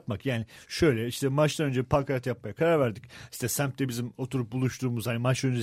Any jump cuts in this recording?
no; 0 cuts

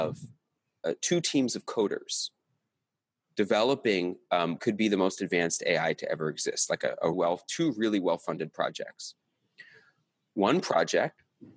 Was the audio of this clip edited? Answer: yes; 2 cuts; at 4.6 s, 7.1 s

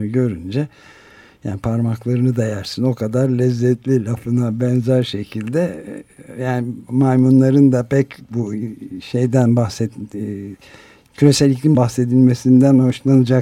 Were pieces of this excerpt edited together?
yes; 1 cut; at 11.7 s

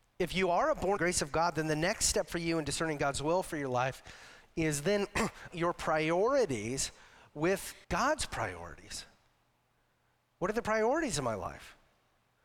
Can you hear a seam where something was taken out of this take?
yes; 3 cuts; at 1.0 s, 5.5 s, 7.8 s

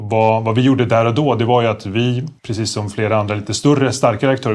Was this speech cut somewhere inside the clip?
yes; 1 cut; at 2.4 s

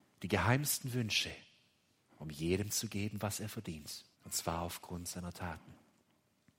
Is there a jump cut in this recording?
yes; 1 cut; at 4.1 s

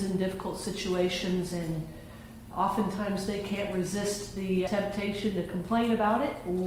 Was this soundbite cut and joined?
yes; 2 cuts; at 2.5 s, 4.7 s

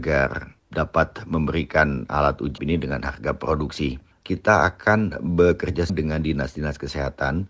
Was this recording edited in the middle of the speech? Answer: yes; 2 cuts; at 2.6 s, 5.9 s

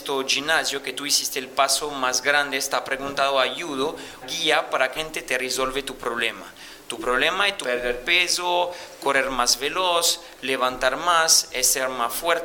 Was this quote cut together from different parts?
yes; 3 cuts; at 4.2 s, 4.9 s, 7.6 s

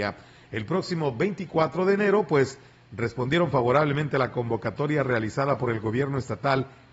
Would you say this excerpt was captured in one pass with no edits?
yes; 0 cuts

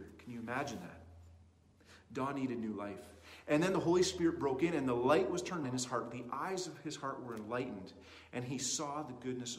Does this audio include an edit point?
yes; 1 cut; at 5.6 s

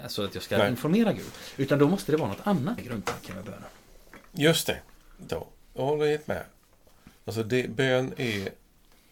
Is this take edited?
yes; 4 cuts; at 2.8 s, 5.3 s, 5.6 s, 7.2 s

